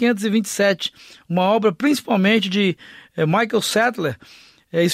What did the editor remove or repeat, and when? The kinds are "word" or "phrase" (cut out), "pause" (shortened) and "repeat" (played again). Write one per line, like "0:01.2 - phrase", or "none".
none